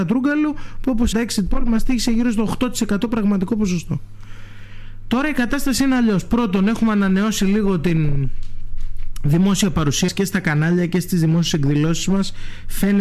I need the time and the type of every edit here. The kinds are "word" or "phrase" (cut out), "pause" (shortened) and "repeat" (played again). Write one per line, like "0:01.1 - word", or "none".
0:01.1 - word
0:10.1 - word